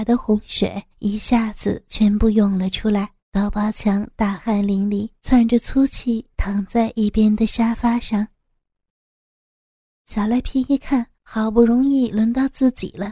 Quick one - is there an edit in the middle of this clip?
yes; 4 cuts; at 0.9 s, 3.2 s, 5.2 s, 11.1 s

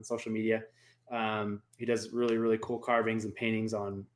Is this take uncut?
no; 1 cut; at 1.7 s

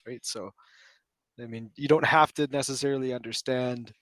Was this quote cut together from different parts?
no; 0 cuts

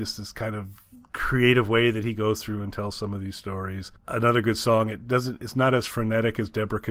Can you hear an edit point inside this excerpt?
no; 0 cuts

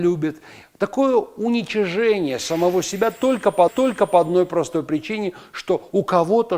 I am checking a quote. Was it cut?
yes; 1 cut; at 3.7 s

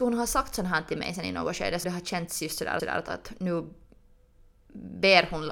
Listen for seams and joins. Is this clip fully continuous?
no; 2 cuts; at 1.8 s, 2.8 s

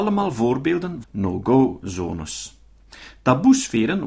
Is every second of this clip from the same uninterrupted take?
no; 1 cut; at 1.0 s

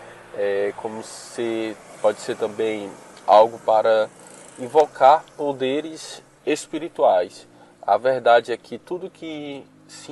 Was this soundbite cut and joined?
no; 0 cuts

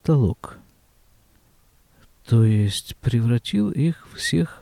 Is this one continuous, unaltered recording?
yes; 0 cuts

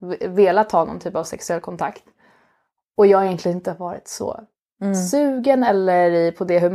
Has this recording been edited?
no; 0 cuts

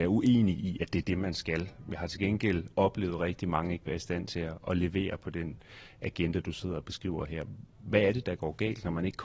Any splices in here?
no; 0 cuts

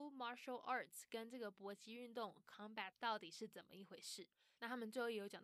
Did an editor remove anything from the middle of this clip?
yes; 1 cut; at 2.9 s

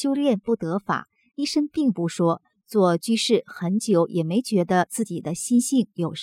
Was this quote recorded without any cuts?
yes; 0 cuts

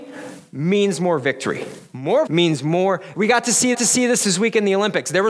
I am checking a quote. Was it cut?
yes; 3 cuts; at 2.3 s, 3.1 s, 3.7 s

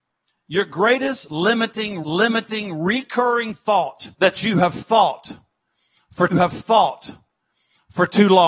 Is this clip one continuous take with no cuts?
no; 3 cuts; at 2.0 s, 4.1 s, 6.3 s

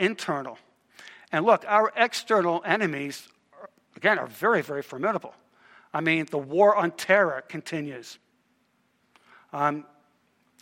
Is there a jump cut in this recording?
no; 0 cuts

